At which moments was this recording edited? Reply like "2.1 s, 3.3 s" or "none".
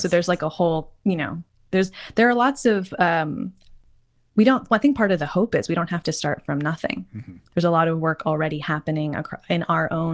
none